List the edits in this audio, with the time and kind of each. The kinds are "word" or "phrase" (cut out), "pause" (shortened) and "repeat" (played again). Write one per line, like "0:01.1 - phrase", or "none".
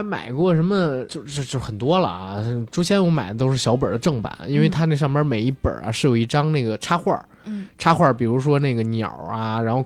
0:01.1 - word